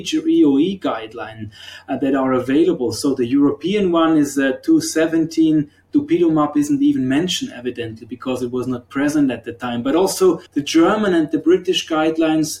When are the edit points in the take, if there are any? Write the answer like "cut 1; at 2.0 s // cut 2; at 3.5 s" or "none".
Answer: cut 1; at 10.5 s